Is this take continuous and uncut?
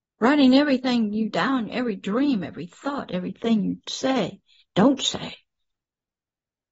no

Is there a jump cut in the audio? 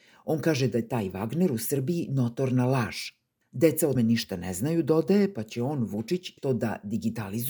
yes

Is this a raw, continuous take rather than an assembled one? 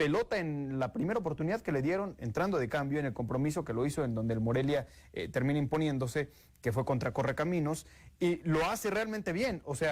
yes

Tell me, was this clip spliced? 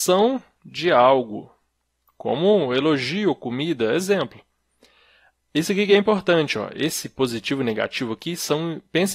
no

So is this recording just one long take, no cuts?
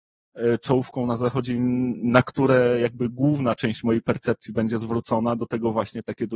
yes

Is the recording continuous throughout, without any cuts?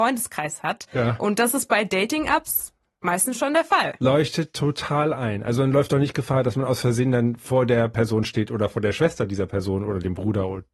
yes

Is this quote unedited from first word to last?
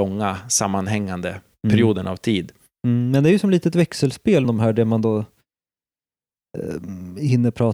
no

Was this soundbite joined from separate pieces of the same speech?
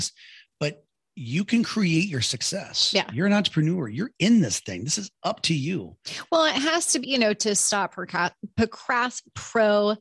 yes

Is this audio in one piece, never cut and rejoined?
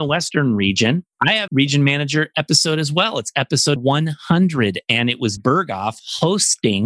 no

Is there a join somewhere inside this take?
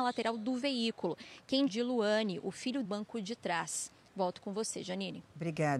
yes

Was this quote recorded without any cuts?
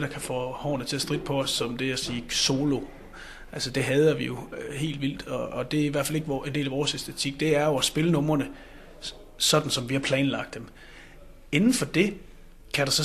yes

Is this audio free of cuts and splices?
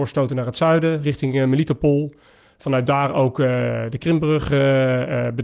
yes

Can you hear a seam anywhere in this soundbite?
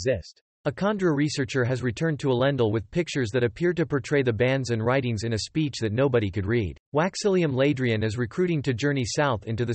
yes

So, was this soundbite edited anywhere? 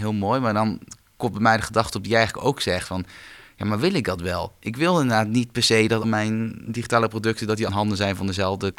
yes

